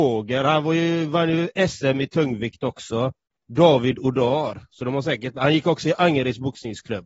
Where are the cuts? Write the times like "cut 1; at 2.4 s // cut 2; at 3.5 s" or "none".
none